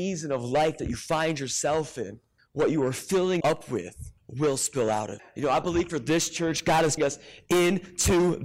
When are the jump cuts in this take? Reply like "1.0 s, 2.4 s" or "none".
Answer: 2.4 s, 3.4 s, 4.2 s, 5.2 s, 7.0 s